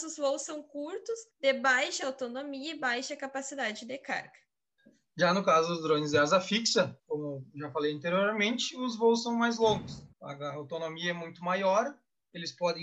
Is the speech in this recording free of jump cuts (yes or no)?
no